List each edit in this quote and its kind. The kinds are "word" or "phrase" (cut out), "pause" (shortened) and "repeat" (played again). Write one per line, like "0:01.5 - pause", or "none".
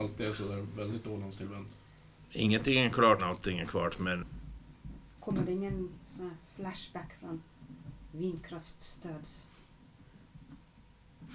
0:03.2 - word